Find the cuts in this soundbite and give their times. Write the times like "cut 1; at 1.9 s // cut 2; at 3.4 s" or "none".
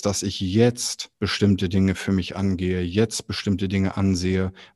cut 1; at 1.1 s

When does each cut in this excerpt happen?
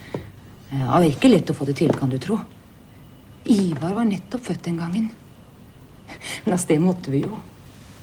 none

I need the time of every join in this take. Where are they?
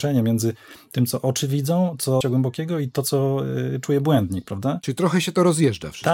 cut 1; at 2.2 s

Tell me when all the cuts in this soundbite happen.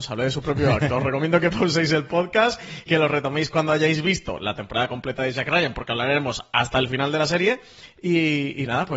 cut 1; at 2.9 s

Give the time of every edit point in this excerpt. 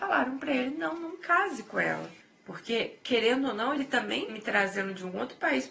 cut 1; at 2.2 s // cut 2; at 4.3 s

